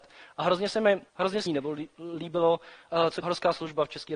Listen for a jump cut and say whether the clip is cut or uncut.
cut